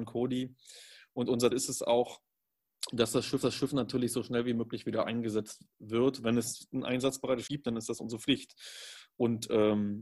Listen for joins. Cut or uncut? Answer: cut